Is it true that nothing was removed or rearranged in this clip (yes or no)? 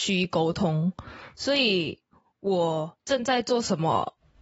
no